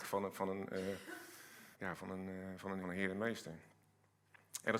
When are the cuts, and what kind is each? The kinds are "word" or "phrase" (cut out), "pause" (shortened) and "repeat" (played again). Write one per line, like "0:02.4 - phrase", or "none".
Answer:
0:01.7 - pause
0:02.8 - phrase

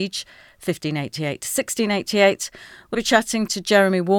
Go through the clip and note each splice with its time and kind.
0:02.9 - word

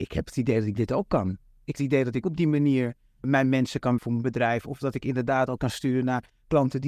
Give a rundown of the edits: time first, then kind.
0:01.8 - word
0:02.2 - word
0:03.2 - word
0:04.0 - word
0:05.6 - word

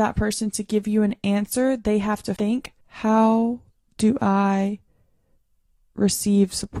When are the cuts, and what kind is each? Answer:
0:02.4 - word
0:02.8 - pause

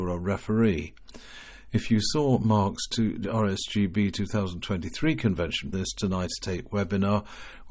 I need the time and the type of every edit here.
0:05.7 - word

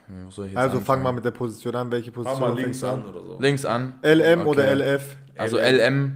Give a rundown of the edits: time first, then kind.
none

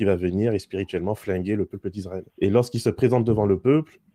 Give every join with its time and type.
0:02.3 - pause

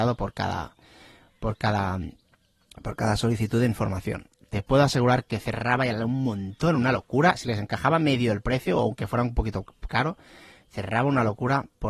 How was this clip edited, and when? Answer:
none

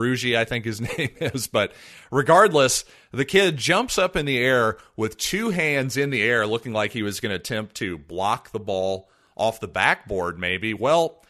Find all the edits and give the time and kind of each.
none

